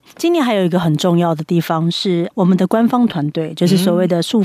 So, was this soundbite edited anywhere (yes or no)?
yes